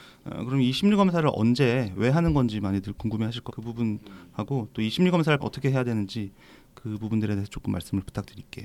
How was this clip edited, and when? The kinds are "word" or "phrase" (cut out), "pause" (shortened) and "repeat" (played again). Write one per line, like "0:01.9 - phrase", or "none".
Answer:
0:03.5 - word
0:05.4 - word